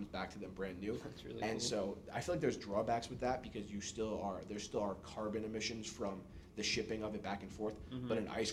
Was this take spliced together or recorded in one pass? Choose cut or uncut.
uncut